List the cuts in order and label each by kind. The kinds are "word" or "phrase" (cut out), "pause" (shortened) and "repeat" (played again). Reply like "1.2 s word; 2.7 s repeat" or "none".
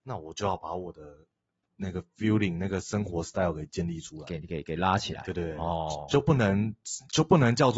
none